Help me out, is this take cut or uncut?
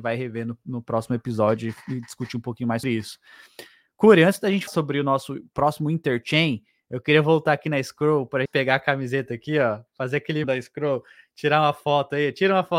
cut